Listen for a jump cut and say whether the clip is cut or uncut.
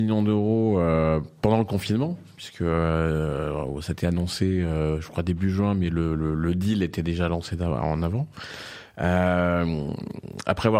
uncut